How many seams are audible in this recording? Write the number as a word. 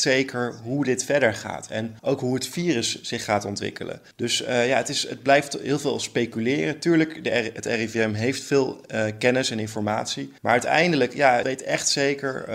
four